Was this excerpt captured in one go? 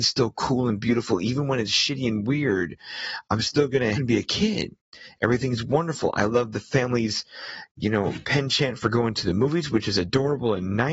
no; 1 cut; at 3.9 s

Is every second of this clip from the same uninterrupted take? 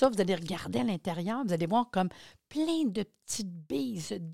yes; 0 cuts

